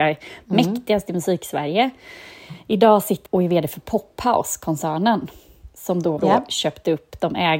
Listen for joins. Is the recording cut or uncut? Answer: cut